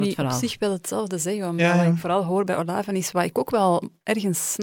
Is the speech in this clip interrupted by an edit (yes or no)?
no